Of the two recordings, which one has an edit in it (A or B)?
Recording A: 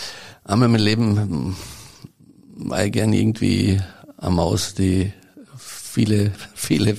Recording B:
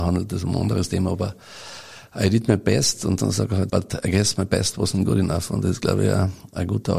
B